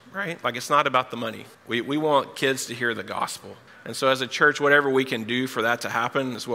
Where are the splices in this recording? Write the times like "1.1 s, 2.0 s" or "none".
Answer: 1.5 s, 3.7 s